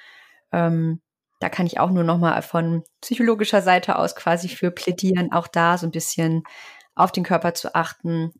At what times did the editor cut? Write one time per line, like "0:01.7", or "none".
none